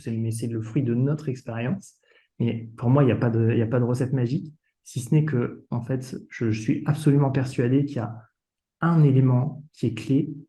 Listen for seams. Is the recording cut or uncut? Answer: uncut